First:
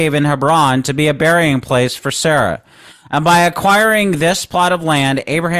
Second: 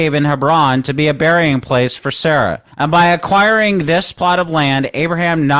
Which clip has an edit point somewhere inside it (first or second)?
second